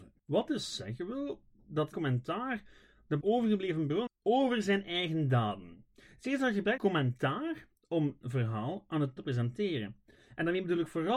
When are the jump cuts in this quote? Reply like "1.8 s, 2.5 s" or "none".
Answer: 1.9 s, 3.2 s, 4.1 s, 6.8 s, 8.2 s, 9.2 s